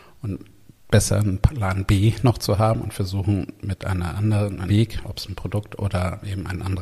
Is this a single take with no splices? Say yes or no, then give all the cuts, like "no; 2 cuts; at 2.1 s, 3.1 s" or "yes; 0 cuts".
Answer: no; 1 cut; at 4.7 s